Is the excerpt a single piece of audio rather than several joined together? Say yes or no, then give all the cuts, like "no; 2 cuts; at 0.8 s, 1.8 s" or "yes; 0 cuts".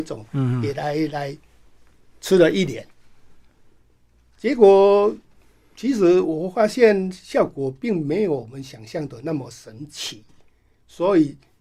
yes; 0 cuts